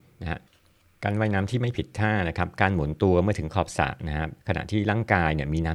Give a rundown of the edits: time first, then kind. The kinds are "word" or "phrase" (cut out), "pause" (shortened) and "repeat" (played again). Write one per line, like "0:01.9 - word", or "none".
0:04.4 - pause